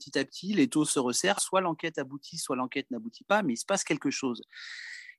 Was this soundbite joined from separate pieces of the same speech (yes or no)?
yes